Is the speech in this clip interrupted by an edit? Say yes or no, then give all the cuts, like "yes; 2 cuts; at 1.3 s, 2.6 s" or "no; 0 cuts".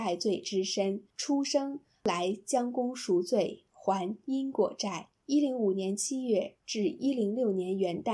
yes; 2 cuts; at 1.1 s, 5.2 s